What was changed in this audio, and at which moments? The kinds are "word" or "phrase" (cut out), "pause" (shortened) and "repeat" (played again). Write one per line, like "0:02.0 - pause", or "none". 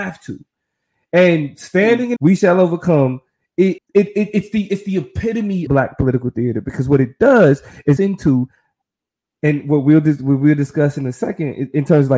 0:02.2 - phrase
0:03.8 - word
0:05.7 - word
0:08.0 - phrase